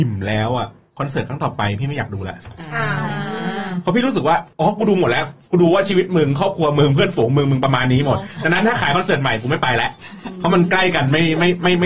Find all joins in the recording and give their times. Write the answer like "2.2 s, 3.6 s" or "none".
4.5 s